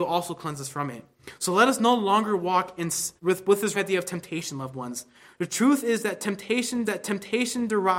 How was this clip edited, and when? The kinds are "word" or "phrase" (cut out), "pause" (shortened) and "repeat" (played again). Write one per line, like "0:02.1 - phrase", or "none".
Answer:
0:03.2 - pause
0:03.7 - word
0:06.9 - repeat